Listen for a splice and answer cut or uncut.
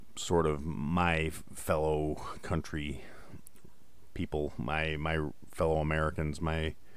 uncut